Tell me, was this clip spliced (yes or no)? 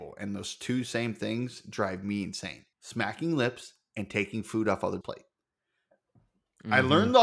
yes